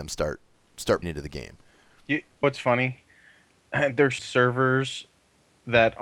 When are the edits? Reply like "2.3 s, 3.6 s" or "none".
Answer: 1.0 s, 2.4 s, 4.2 s